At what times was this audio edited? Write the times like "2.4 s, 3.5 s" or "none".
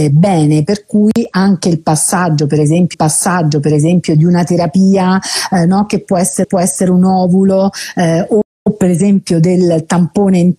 2.9 s, 6.4 s